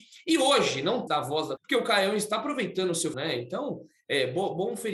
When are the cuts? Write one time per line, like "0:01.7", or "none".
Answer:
0:01.1
0:01.6
0:03.1